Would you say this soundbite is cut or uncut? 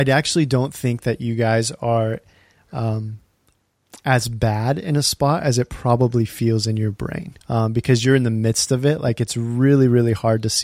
cut